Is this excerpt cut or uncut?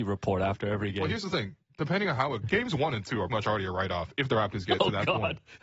cut